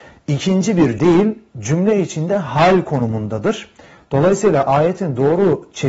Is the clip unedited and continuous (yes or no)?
no